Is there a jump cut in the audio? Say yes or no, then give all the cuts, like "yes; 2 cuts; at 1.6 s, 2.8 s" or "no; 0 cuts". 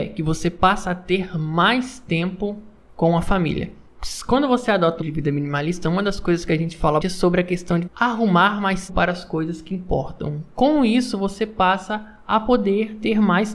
yes; 4 cuts; at 5.0 s, 7.0 s, 7.9 s, 8.9 s